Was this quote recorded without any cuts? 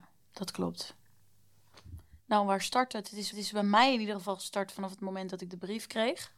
no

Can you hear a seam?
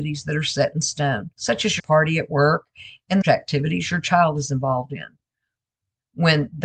yes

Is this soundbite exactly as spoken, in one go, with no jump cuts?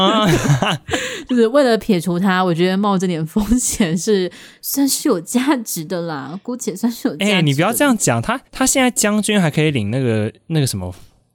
no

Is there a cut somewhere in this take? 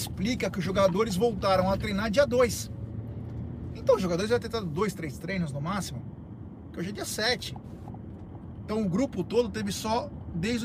no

